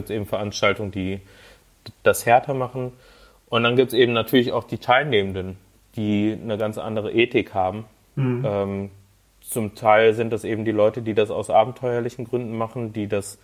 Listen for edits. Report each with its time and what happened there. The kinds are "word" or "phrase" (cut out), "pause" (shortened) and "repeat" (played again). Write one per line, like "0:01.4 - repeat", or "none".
none